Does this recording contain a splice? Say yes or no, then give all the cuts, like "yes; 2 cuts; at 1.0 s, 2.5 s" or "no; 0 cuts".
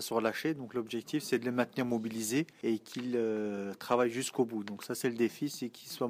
no; 0 cuts